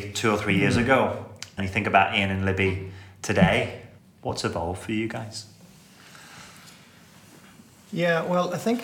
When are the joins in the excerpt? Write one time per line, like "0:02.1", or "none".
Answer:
0:01.6
0:04.0

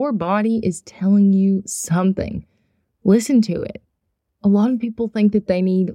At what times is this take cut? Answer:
none

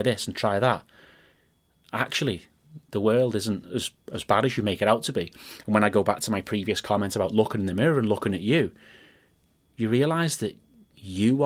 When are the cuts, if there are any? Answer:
none

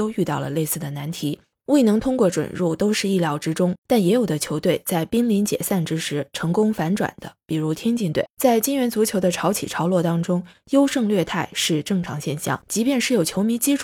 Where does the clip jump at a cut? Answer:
0:03.8

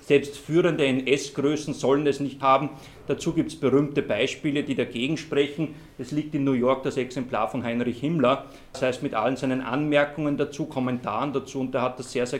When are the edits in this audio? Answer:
0:02.4

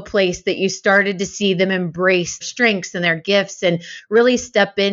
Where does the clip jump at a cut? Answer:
0:02.4

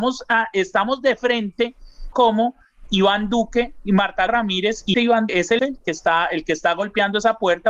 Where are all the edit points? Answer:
0:02.1
0:02.9
0:04.3
0:04.9
0:05.3
0:05.6

